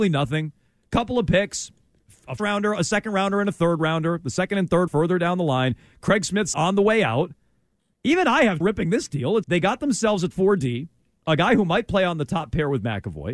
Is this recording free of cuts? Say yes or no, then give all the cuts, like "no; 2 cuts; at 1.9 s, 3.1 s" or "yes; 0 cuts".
no; 6 cuts; at 2.4 s, 4.9 s, 6.5 s, 8.6 s, 9.4 s, 10.3 s